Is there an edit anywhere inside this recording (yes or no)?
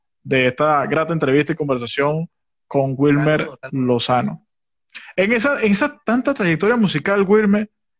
no